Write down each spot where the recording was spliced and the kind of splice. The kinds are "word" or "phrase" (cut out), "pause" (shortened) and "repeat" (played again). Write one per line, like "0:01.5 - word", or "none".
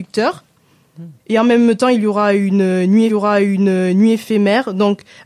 0:01.2 - pause
0:03.1 - repeat